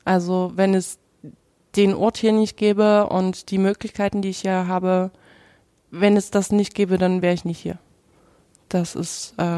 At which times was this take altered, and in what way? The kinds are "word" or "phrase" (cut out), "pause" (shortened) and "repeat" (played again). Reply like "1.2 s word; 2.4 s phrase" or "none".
none